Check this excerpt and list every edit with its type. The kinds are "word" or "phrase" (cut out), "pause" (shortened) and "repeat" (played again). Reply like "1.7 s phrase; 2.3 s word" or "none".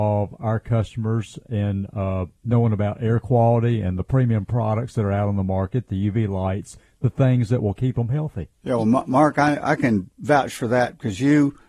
2.4 s pause; 8.5 s pause